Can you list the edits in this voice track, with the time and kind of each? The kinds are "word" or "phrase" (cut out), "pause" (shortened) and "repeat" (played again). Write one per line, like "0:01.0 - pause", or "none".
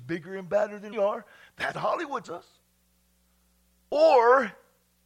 0:00.9 - word
0:01.7 - word
0:02.2 - word

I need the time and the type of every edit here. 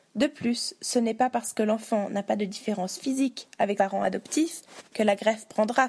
0:03.8 - word

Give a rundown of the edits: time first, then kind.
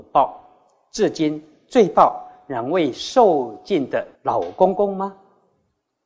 0:04.1 - pause

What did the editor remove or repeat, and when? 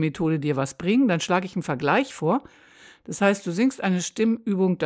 none

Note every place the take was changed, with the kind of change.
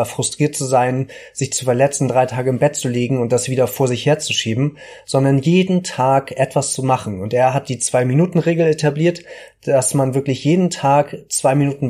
none

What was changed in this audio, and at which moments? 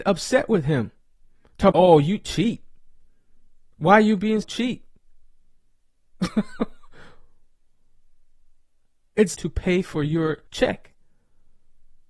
0:01.7 - word
0:04.4 - word
0:09.3 - phrase
0:10.5 - pause

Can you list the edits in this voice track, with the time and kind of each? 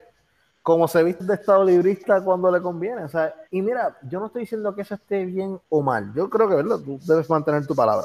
0:01.2 - word
0:03.5 - pause
0:05.6 - pause

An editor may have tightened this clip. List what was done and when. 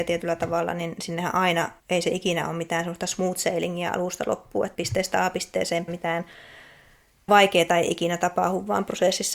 0:01.8 - pause
0:04.7 - word
0:05.9 - word
0:07.3 - word

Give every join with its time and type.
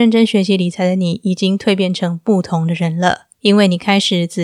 0:03.3 - pause

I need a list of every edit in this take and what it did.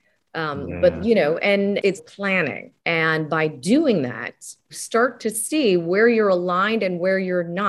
0:02.0 - word
0:02.8 - pause
0:04.7 - word

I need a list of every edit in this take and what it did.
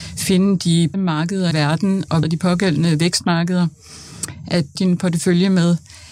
0:00.9 - word
0:01.5 - word
0:02.2 - word
0:04.7 - word

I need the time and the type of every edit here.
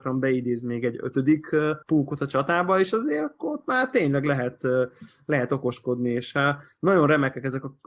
0:01.8 - pause

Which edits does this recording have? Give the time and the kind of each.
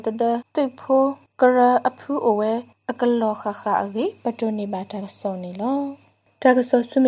none

